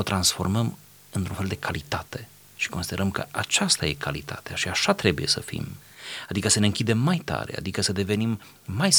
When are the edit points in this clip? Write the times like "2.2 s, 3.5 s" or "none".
none

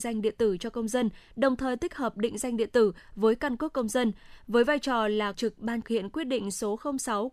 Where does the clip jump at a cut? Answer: 5.3 s, 5.8 s

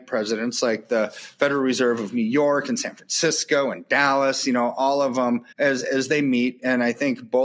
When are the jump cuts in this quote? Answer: 5.5 s

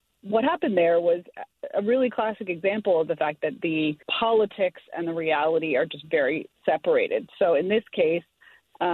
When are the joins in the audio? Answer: 4.0 s, 6.5 s

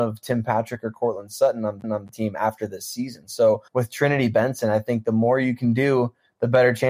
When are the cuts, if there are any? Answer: 1.8 s, 3.7 s

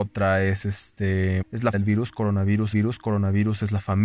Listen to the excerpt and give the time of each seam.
1.4 s, 1.7 s, 2.7 s

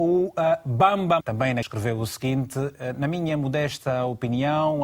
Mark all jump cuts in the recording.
1.2 s, 1.6 s

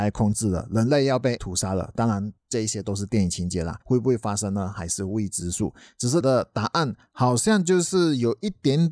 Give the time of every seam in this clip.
1.4 s, 2.4 s, 3.8 s, 6.2 s

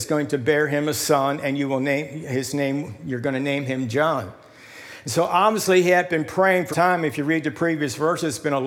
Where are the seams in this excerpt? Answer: 6.7 s

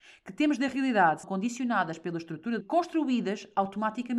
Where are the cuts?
1.2 s, 2.6 s

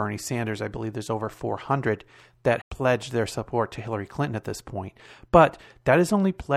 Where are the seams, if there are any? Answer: 2.6 s

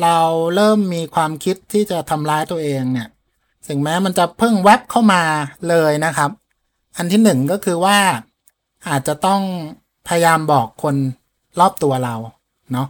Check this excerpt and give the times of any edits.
10.0 s

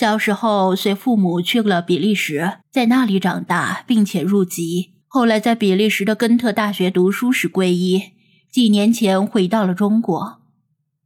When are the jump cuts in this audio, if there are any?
2.6 s, 5.0 s

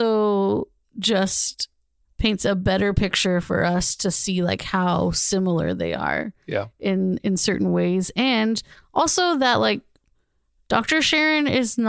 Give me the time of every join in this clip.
none

